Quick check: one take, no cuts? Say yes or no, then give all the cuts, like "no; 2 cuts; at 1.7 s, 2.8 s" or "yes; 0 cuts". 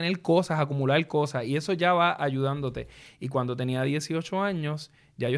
yes; 0 cuts